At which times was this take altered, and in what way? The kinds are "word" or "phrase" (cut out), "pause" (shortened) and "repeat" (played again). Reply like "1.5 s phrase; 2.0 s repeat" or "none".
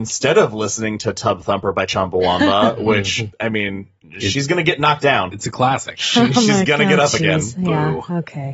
3.3 s word